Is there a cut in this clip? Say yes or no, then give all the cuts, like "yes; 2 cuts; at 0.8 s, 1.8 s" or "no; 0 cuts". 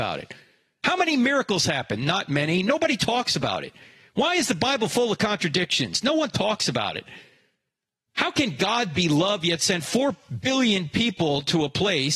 no; 0 cuts